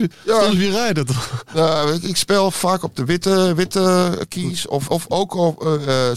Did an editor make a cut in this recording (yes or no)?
yes